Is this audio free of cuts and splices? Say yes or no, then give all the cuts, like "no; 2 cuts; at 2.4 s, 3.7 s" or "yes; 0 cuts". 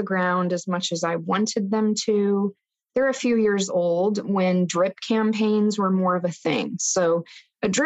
yes; 0 cuts